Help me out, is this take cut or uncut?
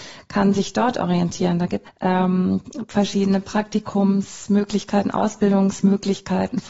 cut